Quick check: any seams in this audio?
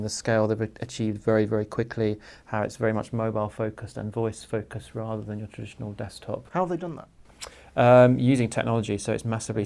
no; 0 cuts

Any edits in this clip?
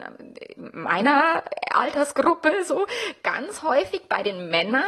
no; 0 cuts

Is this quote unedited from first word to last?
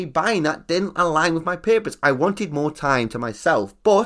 yes; 0 cuts

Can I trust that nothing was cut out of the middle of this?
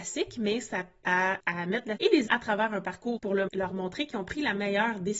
no; 6 cuts; at 1.0 s, 1.4 s, 2.0 s, 2.3 s, 3.2 s, 3.5 s

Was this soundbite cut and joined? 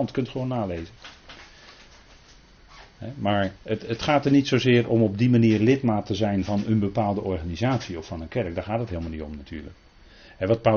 yes; 1 cut; at 3.6 s

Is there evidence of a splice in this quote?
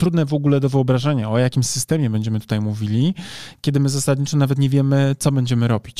no; 0 cuts

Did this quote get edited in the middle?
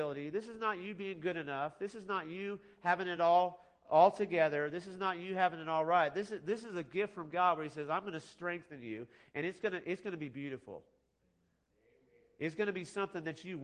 no; 0 cuts

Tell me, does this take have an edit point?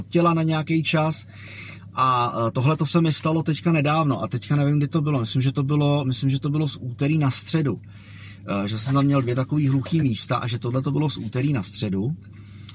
no; 0 cuts

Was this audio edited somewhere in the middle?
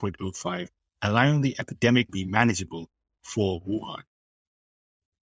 yes; 1 cut; at 2.1 s

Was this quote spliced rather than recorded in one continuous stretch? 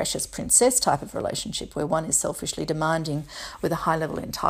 no; 0 cuts

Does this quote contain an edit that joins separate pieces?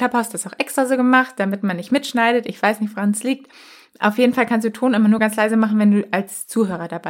no; 0 cuts

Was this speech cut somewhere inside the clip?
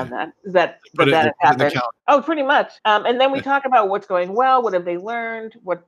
yes; 2 cuts; at 2.0 s, 2.8 s

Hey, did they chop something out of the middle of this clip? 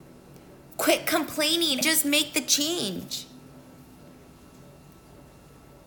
yes; 1 cut; at 1.8 s

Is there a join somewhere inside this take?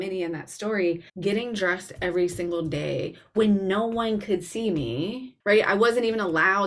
yes; 2 cuts; at 1.1 s, 5.4 s

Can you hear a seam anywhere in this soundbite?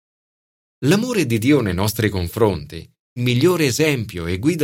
yes; 1 cut; at 3.2 s

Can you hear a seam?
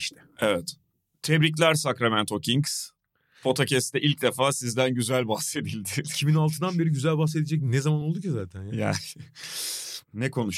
no; 0 cuts

